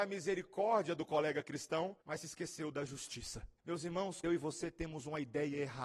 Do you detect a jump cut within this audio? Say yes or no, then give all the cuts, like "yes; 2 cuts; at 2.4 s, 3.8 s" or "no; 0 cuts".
yes; 3 cuts; at 2.0 s, 3.6 s, 4.2 s